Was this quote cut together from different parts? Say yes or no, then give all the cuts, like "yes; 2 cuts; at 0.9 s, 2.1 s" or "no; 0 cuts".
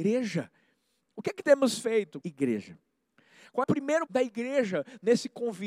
yes; 4 cuts; at 1.4 s, 2.2 s, 3.6 s, 4.1 s